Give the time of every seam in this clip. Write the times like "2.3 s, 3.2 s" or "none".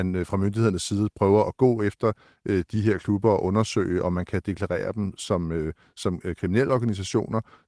none

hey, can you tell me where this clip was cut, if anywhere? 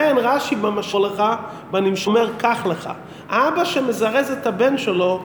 0.9 s, 2.1 s

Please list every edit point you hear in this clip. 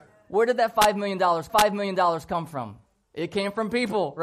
1.5 s, 2.9 s

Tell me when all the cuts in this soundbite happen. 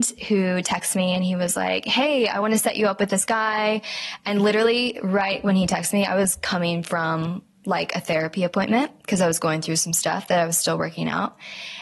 none

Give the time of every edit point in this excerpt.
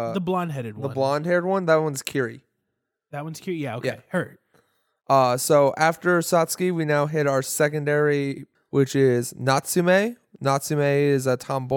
8.5 s

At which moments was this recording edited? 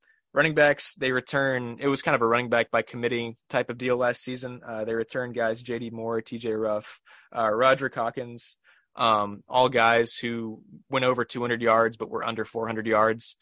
none

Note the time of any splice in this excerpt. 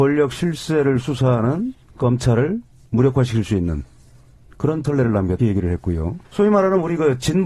1.9 s, 4.8 s, 5.4 s, 6.2 s

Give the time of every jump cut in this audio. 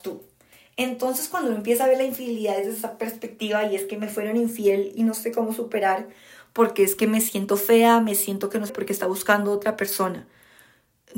8.7 s

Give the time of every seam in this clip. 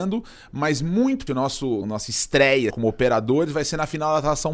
1.3 s, 1.8 s, 2.7 s

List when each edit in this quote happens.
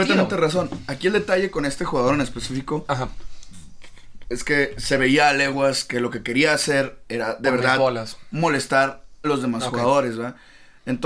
9.2 s

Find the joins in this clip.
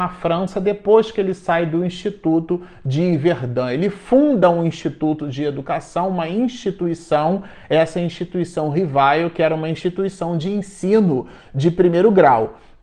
none

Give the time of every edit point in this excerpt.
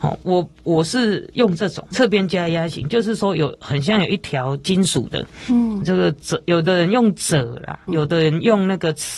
1.9 s, 5.8 s, 7.9 s

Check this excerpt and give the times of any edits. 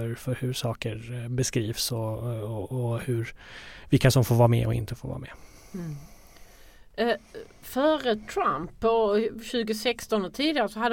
7.5 s

